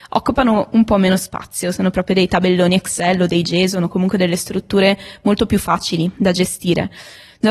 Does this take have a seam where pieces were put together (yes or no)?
no